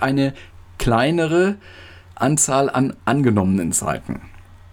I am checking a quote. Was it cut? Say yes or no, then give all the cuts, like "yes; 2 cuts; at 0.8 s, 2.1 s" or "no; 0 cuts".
no; 0 cuts